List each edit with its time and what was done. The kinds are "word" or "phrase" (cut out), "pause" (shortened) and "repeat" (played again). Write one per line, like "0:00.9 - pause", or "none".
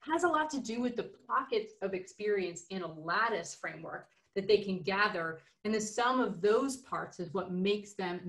none